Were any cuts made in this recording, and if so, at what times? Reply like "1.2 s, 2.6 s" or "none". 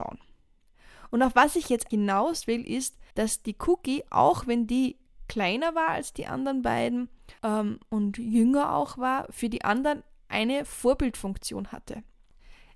1.9 s, 3.1 s, 7.4 s